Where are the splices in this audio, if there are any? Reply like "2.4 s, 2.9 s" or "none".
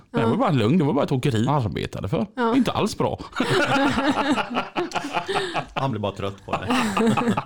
1.5 s, 2.5 s, 5.9 s

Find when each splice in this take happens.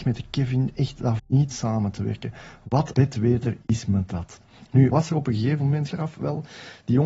1.2 s, 1.5 s, 2.9 s, 4.9 s, 5.9 s

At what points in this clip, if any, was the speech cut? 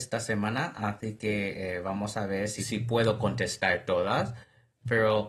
none

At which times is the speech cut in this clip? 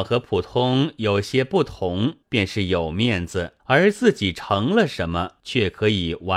2.2 s, 3.6 s, 5.4 s

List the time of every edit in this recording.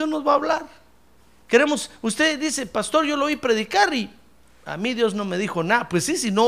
none

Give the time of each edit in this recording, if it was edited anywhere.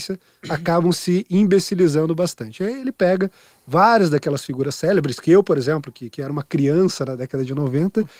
none

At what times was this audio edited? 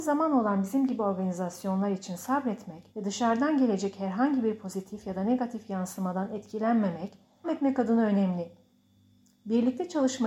2.9 s, 7.4 s

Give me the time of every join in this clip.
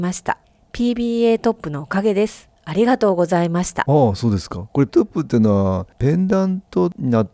4.9 s

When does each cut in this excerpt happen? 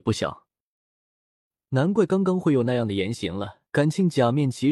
3.7 s

